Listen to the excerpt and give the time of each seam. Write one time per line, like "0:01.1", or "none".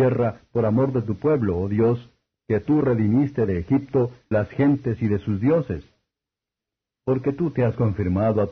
0:04.3